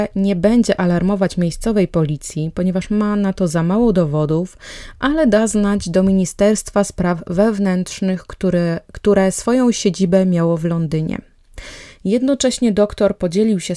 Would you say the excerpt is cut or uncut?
uncut